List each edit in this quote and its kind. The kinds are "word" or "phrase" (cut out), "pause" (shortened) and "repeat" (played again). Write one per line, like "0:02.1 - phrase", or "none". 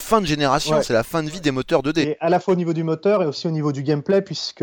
0:02.2 - word